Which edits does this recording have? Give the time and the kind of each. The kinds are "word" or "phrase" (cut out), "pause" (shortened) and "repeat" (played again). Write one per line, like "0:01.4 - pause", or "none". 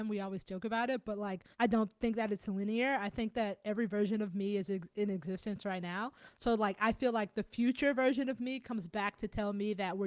0:01.5 - pause

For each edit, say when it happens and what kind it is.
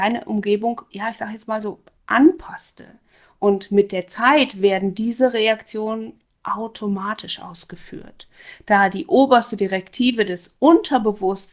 none

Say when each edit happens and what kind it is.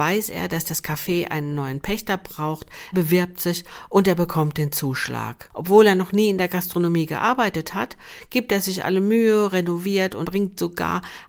0:02.9 - word
0:10.2 - word

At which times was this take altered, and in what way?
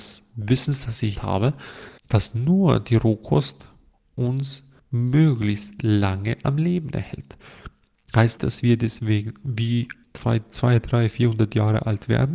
0:01.2 - word
0:02.0 - pause
0:04.8 - pause
0:08.4 - word
0:10.0 - word

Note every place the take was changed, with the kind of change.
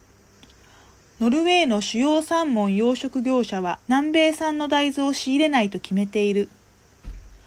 0:03.8 - pause

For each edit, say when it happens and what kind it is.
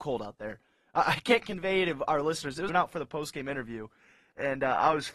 0:02.7 - phrase

